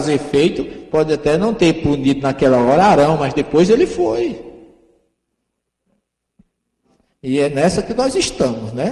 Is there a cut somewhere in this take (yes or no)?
no